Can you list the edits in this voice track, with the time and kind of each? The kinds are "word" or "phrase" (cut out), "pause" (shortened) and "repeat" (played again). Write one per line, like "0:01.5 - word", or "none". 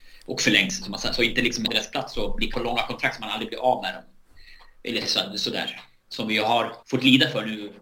0:01.7 - phrase
0:02.5 - word
0:06.8 - pause